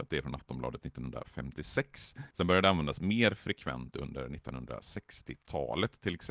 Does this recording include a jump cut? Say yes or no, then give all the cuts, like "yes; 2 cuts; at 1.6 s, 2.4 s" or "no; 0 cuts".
yes; 1 cut; at 2.3 s